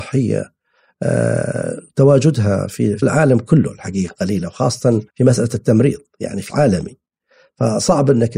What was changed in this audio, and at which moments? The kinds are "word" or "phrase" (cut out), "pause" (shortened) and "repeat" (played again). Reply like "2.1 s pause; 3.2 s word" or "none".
3.0 s word; 5.1 s pause; 6.5 s word

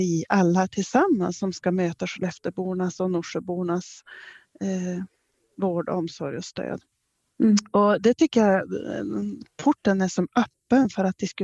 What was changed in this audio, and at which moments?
none

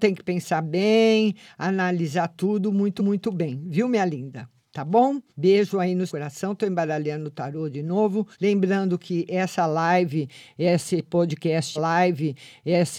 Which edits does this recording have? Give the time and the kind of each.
3.0 s repeat; 5.3 s pause; 6.1 s word; 8.3 s pause; 11.8 s repeat

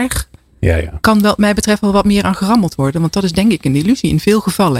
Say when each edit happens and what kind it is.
none

